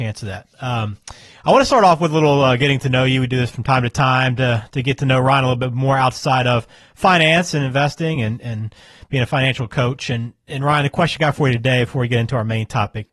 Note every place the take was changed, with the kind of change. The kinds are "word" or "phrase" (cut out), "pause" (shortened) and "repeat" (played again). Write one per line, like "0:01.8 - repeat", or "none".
none